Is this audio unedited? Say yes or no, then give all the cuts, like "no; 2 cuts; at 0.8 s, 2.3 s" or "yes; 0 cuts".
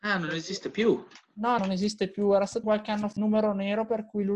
no; 3 cuts; at 1.6 s, 2.6 s, 3.2 s